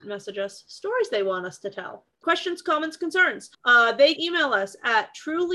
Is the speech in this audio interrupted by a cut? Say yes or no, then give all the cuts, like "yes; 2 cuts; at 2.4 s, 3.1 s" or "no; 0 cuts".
yes; 2 cuts; at 3.5 s, 4.2 s